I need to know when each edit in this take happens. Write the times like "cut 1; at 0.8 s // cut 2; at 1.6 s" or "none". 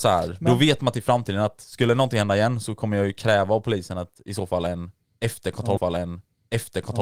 cut 1; at 5.8 s